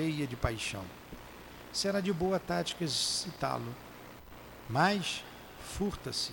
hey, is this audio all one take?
yes; 0 cuts

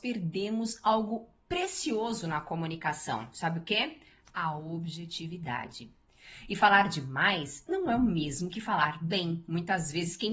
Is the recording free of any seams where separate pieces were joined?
yes; 0 cuts

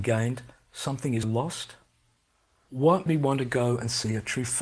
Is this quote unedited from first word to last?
no; 2 cuts; at 1.2 s, 3.1 s

